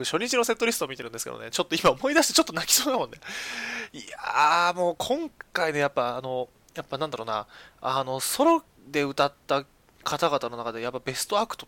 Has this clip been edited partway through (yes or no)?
no